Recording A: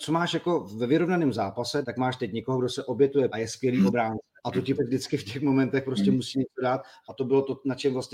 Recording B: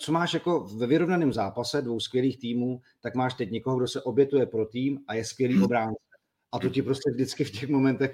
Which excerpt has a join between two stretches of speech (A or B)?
A